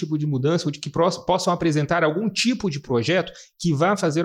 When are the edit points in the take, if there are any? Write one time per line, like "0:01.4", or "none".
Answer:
none